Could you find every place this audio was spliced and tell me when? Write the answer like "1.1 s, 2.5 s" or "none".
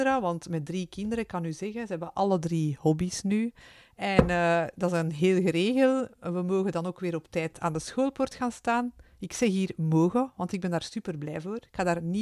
none